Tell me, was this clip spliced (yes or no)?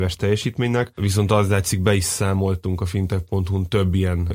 no